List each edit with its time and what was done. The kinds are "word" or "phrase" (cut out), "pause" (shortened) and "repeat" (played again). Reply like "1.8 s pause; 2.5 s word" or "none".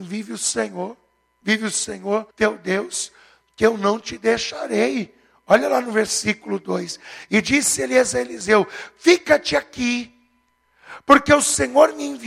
2.3 s pause